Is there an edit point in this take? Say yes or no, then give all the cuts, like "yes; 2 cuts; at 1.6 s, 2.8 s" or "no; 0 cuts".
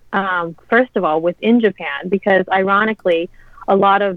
no; 0 cuts